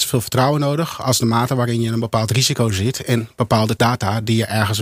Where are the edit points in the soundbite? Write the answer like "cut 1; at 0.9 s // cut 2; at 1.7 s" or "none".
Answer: cut 1; at 3.8 s

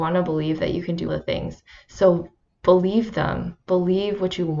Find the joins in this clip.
cut 1; at 1.1 s

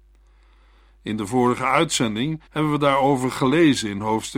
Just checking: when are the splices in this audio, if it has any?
cut 1; at 2.5 s

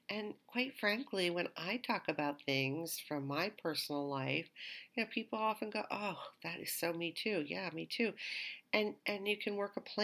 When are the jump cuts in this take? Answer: none

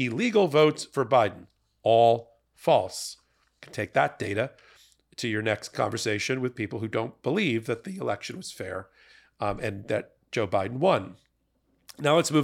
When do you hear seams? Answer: none

